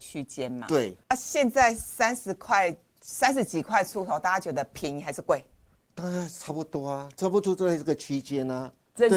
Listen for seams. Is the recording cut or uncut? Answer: uncut